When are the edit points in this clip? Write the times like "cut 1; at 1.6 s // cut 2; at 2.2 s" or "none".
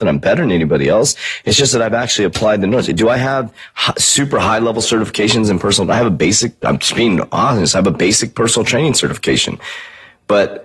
none